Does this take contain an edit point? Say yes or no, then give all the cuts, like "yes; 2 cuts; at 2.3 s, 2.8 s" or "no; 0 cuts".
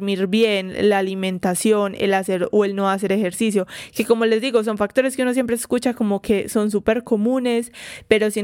no; 0 cuts